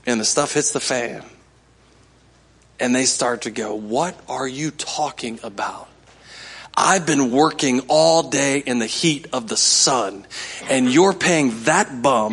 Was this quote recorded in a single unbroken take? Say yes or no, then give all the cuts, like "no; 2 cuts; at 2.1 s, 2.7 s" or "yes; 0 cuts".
yes; 0 cuts